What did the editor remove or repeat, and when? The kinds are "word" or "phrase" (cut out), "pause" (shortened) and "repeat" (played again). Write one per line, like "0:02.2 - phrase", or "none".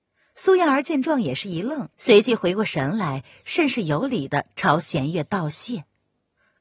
0:01.9 - pause